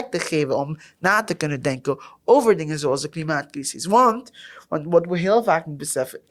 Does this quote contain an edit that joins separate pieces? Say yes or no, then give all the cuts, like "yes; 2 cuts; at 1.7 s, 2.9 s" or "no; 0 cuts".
no; 0 cuts